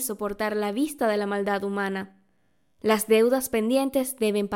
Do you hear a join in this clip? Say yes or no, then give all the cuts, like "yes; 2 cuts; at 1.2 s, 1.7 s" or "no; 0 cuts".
no; 0 cuts